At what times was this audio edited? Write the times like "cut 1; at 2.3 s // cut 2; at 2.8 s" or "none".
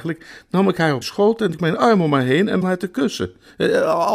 cut 1; at 1.0 s // cut 2; at 1.5 s // cut 3; at 2.6 s